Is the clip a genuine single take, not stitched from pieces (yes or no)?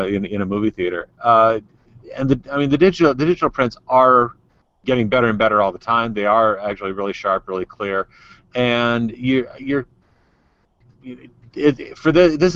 yes